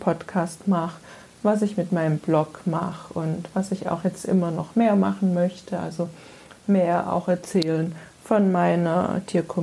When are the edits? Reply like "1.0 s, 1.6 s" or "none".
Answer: none